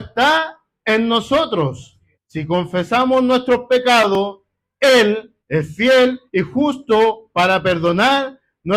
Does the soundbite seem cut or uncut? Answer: cut